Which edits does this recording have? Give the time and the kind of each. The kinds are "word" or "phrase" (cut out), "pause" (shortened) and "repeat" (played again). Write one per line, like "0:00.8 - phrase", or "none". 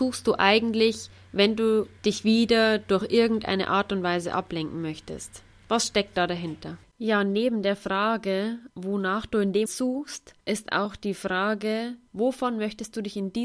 0:08.7 - pause
0:09.7 - word
0:10.4 - pause